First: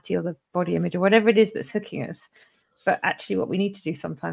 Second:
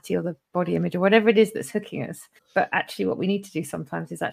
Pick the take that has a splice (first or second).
second